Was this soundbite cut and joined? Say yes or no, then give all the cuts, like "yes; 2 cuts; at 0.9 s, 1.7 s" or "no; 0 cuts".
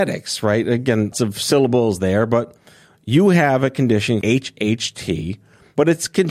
yes; 2 cuts; at 1.1 s, 4.2 s